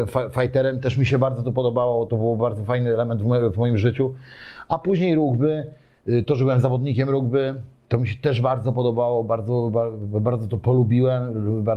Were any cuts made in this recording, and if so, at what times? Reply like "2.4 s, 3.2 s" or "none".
2.1 s